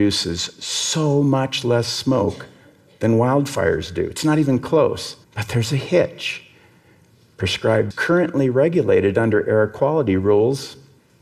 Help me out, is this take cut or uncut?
cut